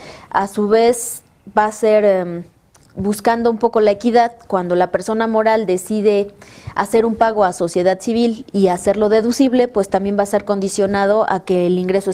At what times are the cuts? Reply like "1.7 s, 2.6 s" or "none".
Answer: none